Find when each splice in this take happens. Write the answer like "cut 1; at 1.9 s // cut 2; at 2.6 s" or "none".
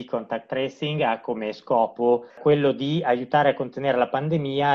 cut 1; at 2.3 s

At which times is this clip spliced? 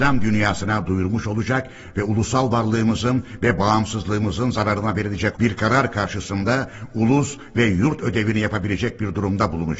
cut 1; at 5.3 s

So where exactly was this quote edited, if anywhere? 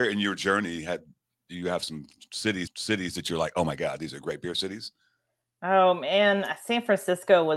cut 1; at 2.7 s

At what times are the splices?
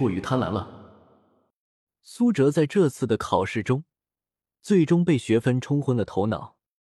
none

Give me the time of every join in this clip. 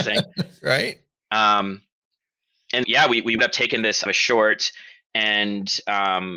cut 1; at 2.8 s // cut 2; at 3.4 s // cut 3; at 4.1 s

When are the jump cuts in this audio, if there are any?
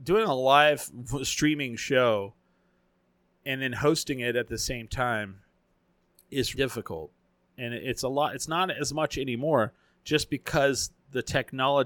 cut 1; at 6.5 s

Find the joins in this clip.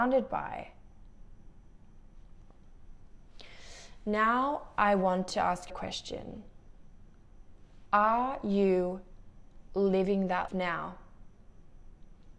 cut 1; at 5.7 s // cut 2; at 10.5 s

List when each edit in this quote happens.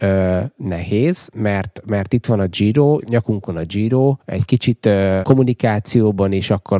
cut 1; at 3.0 s // cut 2; at 4.2 s // cut 3; at 5.2 s

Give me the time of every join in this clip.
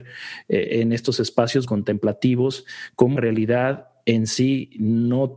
cut 1; at 1.6 s // cut 2; at 3.2 s

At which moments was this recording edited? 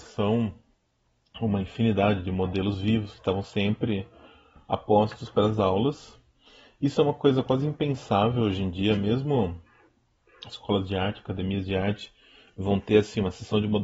none

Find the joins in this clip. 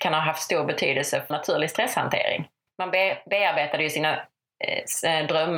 cut 1; at 1.3 s // cut 2; at 2.7 s

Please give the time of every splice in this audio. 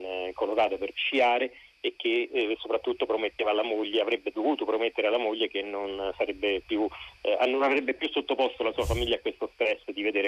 none

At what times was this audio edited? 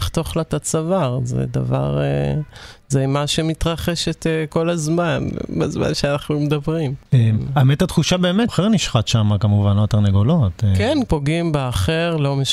cut 1; at 8.5 s // cut 2; at 11.1 s

